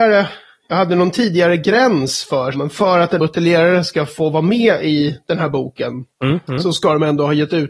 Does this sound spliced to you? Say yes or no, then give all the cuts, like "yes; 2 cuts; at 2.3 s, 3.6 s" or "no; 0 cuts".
yes; 3 cuts; at 2.5 s, 3.2 s, 6.1 s